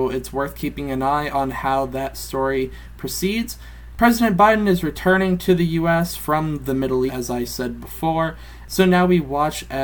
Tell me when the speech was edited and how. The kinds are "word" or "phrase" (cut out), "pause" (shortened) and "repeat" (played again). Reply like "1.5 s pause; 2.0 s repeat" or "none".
7.1 s word

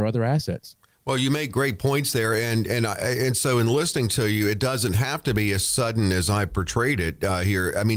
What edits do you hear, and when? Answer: none

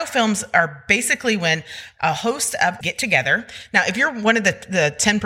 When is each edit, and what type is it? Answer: 2.8 s word

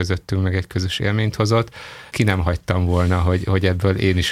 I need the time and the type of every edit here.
2.1 s pause

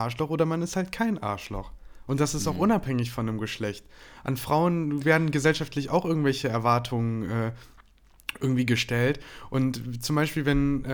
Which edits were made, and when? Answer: none

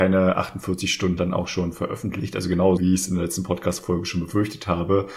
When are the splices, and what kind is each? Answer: 1.2 s word; 2.8 s word

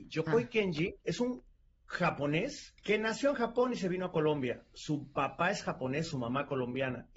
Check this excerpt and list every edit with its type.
1.0 s pause; 2.8 s pause

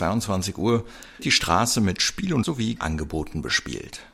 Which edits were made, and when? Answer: 1.2 s word; 2.4 s word; 2.8 s word

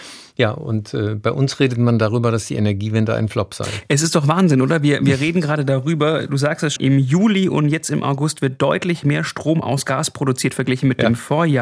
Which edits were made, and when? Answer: 6.8 s word

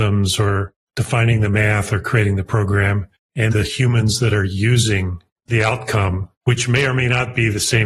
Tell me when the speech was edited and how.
3.5 s word

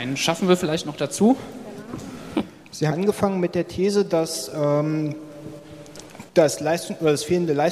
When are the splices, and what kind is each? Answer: 2.9 s word; 6.3 s pause

